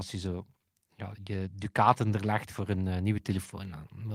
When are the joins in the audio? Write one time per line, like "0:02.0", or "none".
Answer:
none